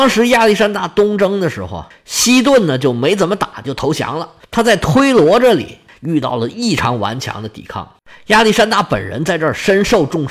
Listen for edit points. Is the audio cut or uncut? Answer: uncut